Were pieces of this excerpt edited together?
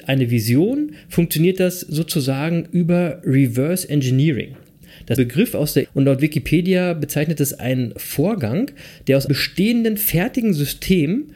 yes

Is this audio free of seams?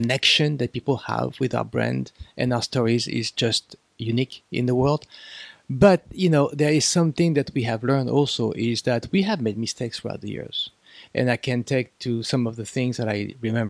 yes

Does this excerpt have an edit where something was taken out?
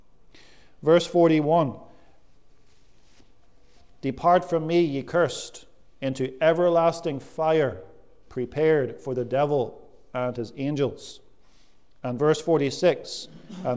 no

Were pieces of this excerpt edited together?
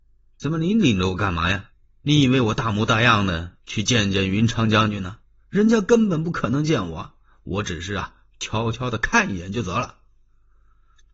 no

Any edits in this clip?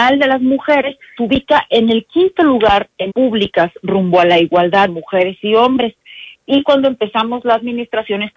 yes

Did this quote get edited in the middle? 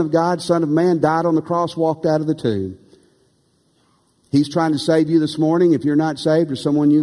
no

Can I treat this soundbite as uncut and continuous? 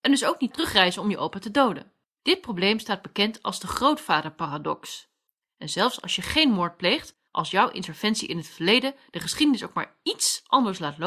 no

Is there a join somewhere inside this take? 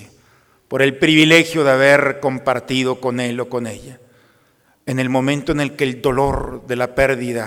no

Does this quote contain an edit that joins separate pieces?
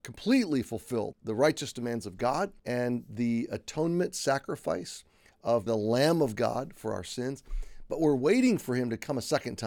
yes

